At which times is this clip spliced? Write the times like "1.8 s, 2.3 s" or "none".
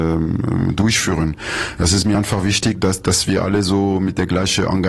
none